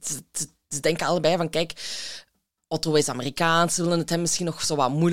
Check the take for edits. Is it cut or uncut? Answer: uncut